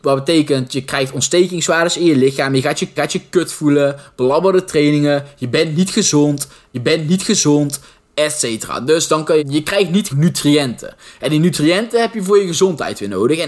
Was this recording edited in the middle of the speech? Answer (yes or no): yes